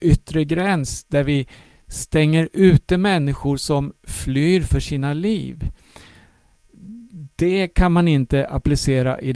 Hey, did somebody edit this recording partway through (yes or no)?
no